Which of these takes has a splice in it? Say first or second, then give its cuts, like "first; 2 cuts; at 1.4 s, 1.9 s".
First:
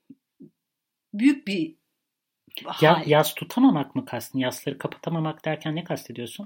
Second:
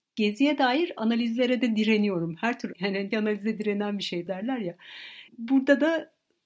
second; 4 cuts; at 2.7 s, 3.1 s, 4.3 s, 5.3 s